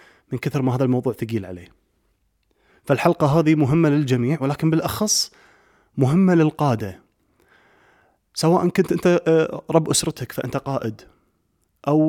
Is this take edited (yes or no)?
no